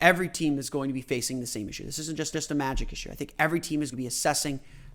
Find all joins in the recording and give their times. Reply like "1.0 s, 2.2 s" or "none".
2.3 s, 3.9 s